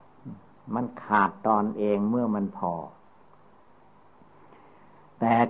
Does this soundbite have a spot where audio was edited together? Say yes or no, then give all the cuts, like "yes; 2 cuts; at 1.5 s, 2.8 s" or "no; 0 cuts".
no; 0 cuts